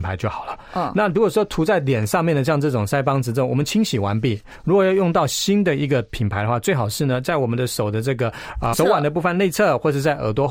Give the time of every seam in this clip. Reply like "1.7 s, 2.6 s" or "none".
8.7 s

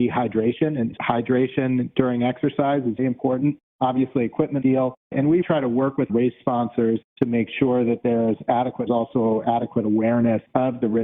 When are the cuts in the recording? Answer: 1.0 s, 3.0 s, 4.6 s, 5.4 s, 6.1 s, 8.9 s

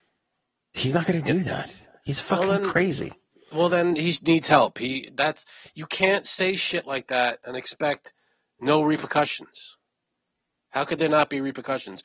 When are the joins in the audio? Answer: none

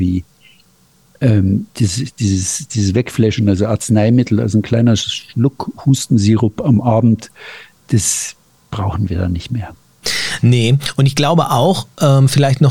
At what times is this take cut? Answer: none

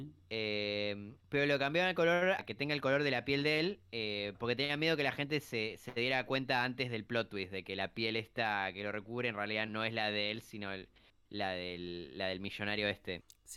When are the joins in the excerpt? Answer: 1.2 s, 2.4 s, 3.9 s, 9.7 s

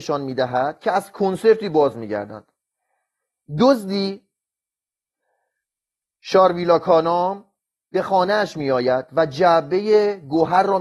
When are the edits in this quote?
none

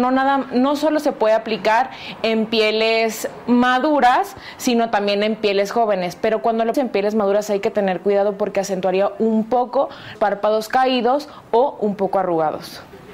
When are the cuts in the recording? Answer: 6.7 s, 10.2 s

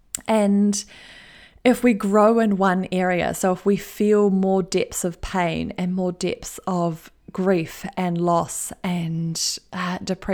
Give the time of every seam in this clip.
none

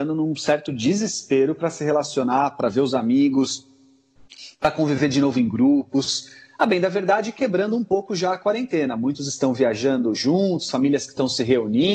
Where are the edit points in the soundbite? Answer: none

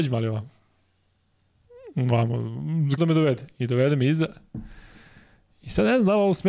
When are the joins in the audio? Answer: 3.0 s

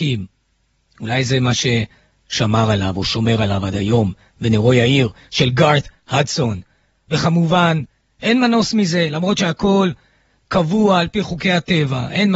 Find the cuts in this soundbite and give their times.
none

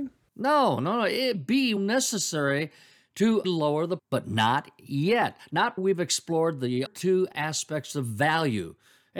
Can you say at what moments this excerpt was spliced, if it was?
1.3 s, 1.8 s, 3.4 s, 4.0 s, 5.8 s, 6.9 s

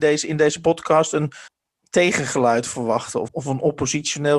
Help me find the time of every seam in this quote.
1.5 s, 3.3 s

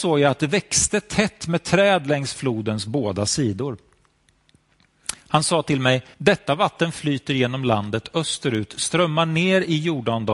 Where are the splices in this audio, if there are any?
6.1 s

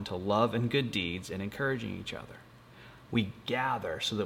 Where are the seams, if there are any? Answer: none

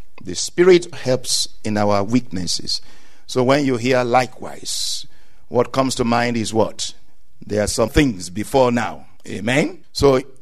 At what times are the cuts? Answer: 0.9 s, 7.9 s

